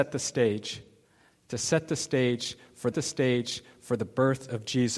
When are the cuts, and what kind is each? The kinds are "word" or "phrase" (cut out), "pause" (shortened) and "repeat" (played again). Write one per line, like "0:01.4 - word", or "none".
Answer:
0:02.9 - repeat